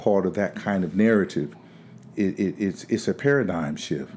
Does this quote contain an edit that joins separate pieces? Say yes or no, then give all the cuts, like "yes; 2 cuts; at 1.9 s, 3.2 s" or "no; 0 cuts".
yes; 1 cut; at 2.2 s